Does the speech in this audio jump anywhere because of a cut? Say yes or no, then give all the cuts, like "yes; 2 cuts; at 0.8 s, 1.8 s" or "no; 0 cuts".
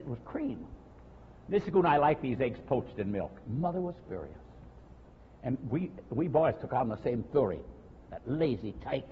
no; 0 cuts